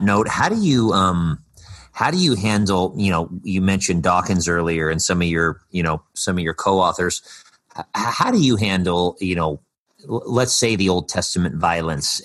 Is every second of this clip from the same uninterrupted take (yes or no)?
yes